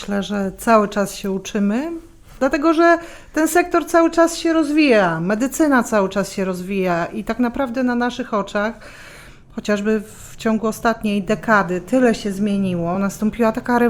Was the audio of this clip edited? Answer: no; 0 cuts

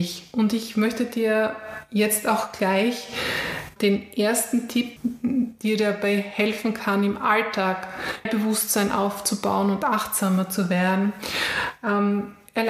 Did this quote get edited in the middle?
yes; 3 cuts; at 3.8 s, 5.0 s, 8.3 s

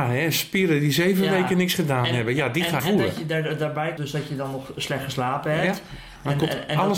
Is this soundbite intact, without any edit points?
no; 2 cuts; at 2.8 s, 4.0 s

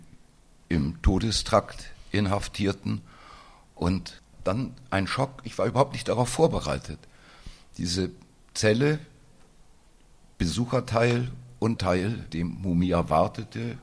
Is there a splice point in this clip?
yes; 3 cuts; at 4.3 s, 11.8 s, 12.3 s

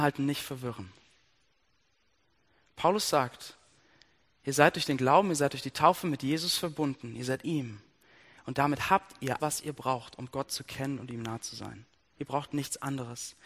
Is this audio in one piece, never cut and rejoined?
no; 2 cuts; at 7.4 s, 9.4 s

